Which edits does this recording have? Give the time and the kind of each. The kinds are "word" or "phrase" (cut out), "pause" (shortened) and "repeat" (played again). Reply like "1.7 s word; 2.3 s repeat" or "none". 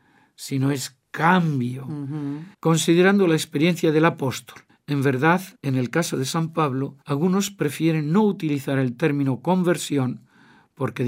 2.5 s pause; 4.7 s pause; 5.5 s pause; 7.0 s pause